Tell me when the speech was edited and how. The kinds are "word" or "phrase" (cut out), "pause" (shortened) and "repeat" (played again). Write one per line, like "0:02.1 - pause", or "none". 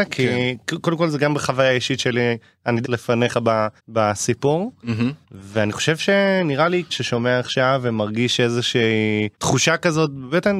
0:02.8 - phrase
0:03.8 - pause
0:05.2 - pause
0:06.9 - phrase
0:09.3 - pause